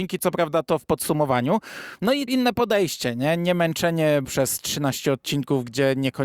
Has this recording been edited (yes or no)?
yes